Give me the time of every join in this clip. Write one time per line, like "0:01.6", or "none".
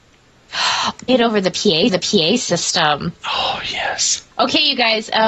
0:01.1
0:01.9
0:04.3